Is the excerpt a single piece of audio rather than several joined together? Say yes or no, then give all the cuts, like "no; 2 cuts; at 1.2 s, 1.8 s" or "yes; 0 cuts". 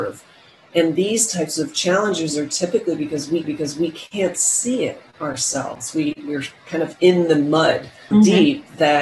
no; 2 cuts; at 3.4 s, 8.1 s